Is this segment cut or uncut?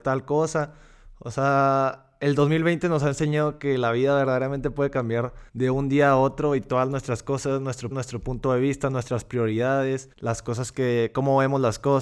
cut